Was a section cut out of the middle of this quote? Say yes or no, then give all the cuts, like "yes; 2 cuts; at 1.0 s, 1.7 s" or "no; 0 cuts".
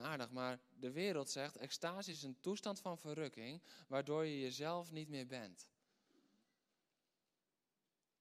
no; 0 cuts